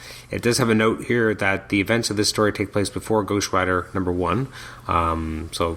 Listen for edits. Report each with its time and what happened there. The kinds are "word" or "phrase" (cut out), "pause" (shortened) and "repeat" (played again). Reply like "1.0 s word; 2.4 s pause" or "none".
none